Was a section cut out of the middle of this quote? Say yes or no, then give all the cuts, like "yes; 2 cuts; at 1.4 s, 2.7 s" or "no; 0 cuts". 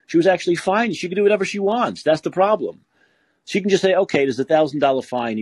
no; 0 cuts